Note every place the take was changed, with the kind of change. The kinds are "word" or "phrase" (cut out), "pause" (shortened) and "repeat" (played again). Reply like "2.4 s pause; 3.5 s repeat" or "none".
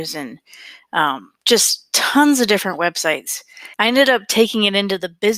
3.7 s pause